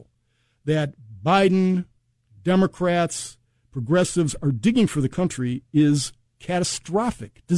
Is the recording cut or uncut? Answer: uncut